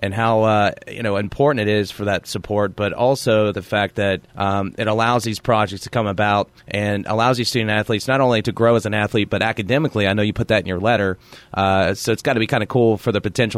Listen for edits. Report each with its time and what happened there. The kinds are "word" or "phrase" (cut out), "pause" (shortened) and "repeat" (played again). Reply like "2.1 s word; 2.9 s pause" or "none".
4.3 s pause; 6.6 s pause